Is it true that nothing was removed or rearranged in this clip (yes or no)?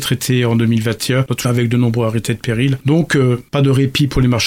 no